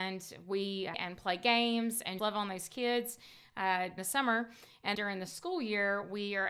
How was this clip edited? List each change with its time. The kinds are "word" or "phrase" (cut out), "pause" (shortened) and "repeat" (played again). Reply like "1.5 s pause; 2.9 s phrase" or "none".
0.9 s phrase; 2.2 s word; 4.0 s word; 4.9 s word